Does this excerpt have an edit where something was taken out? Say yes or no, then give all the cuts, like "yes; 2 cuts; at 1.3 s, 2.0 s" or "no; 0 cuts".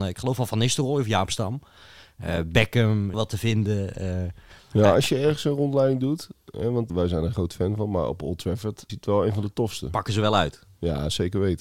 yes; 4 cuts; at 3.1 s, 6.9 s, 7.3 s, 8.9 s